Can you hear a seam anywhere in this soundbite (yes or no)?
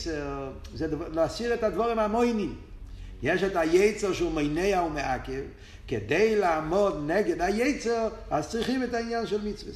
no